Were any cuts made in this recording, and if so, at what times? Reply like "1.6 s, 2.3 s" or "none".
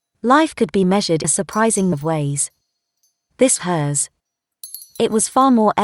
1.2 s, 1.9 s, 3.6 s